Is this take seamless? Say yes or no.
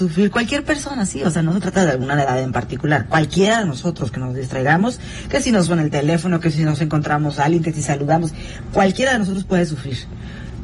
yes